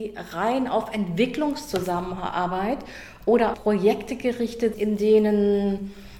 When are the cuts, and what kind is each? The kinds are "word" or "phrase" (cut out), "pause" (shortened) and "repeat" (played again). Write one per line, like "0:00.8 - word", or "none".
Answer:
0:03.5 - word
0:04.7 - word